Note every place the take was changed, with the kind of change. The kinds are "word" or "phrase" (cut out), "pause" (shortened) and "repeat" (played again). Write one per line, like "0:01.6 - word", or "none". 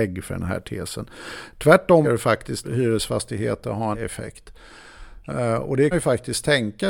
0:02.0 - word
0:02.6 - word
0:03.9 - phrase
0:05.9 - phrase